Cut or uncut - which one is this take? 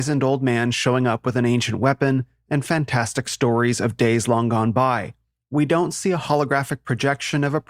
uncut